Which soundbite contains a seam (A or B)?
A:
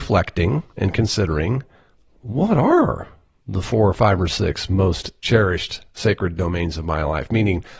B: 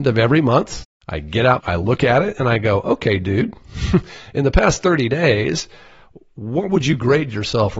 B